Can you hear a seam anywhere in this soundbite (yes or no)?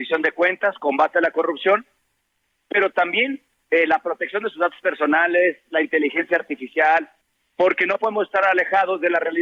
no